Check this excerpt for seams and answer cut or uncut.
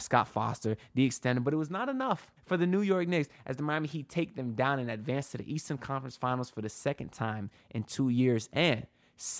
cut